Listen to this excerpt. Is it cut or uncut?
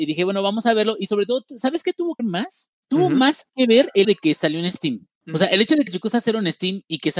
cut